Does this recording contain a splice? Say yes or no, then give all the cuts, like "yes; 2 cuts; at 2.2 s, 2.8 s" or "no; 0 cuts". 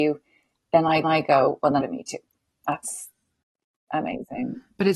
yes; 3 cuts; at 1.0 s, 1.8 s, 2.3 s